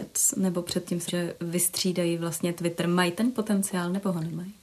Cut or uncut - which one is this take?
cut